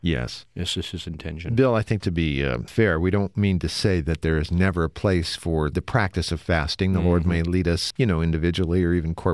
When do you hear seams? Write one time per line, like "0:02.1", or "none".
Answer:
0:02.0
0:07.9